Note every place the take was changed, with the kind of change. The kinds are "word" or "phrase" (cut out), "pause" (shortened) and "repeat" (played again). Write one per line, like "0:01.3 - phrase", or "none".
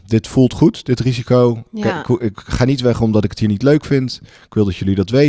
none